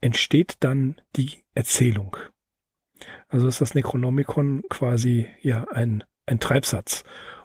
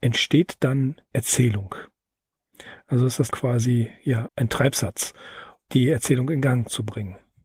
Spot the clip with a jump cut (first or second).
second